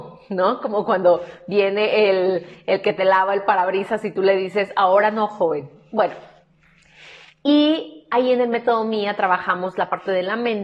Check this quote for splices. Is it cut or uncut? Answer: uncut